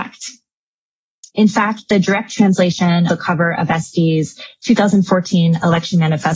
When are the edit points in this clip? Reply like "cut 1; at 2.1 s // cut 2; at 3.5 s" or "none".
cut 1; at 3.1 s